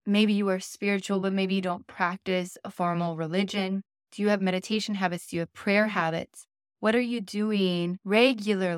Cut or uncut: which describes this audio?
uncut